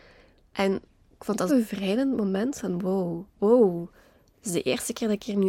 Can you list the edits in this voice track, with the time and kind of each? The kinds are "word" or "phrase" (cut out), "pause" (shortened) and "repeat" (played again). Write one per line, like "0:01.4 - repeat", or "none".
0:01.5 - word
0:03.3 - pause